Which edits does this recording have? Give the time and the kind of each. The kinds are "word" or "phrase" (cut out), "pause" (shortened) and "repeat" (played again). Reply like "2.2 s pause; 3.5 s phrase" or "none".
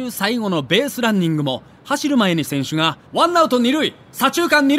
3.1 s pause

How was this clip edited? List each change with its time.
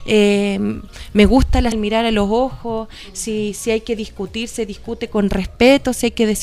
1.7 s word

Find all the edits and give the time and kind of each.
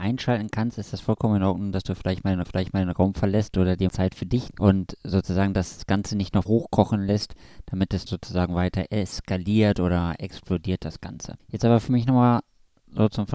2.4 s repeat; 3.9 s word; 4.5 s word; 6.5 s word; 8.1 s word; 11.4 s pause

